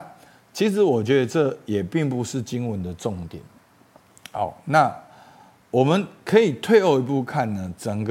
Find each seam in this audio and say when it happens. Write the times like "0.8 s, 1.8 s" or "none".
none